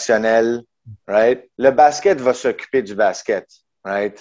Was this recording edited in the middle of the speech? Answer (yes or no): yes